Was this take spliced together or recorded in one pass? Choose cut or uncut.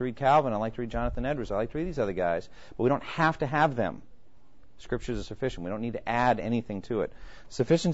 uncut